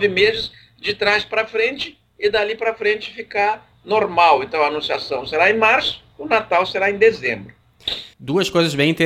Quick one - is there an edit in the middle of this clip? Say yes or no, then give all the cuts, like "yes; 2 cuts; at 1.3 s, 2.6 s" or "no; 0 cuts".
yes; 1 cut; at 6.1 s